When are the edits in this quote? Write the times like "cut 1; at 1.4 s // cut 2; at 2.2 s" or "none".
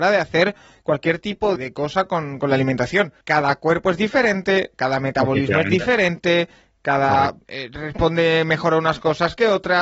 cut 1; at 1.6 s // cut 2; at 3.2 s // cut 3; at 7.4 s